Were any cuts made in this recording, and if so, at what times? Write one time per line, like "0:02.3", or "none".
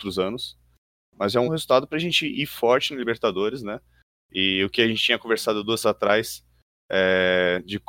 0:01.4
0:05.8